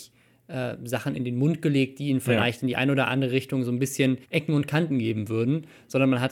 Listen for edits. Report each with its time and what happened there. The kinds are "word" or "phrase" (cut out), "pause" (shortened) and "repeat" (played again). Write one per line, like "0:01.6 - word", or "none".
0:04.2 - pause